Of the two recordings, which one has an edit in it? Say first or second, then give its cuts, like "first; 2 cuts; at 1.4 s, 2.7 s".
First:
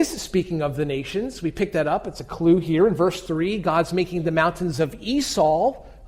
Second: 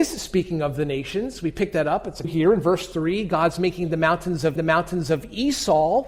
second; 2 cuts; at 2.2 s, 4.6 s